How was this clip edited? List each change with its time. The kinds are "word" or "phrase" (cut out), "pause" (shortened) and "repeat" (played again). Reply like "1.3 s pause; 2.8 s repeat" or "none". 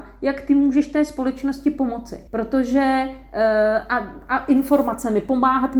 2.3 s pause